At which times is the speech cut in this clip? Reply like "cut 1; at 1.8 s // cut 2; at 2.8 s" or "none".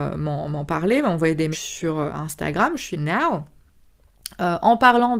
cut 1; at 1.5 s // cut 2; at 2.9 s